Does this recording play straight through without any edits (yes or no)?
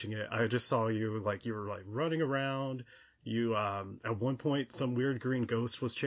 yes